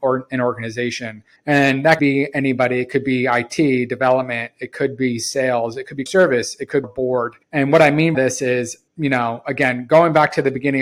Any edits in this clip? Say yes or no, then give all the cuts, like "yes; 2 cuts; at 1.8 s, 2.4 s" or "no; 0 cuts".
yes; 7 cuts; at 1.4 s, 2.0 s, 6.1 s, 6.8 s, 7.4 s, 8.1 s, 8.9 s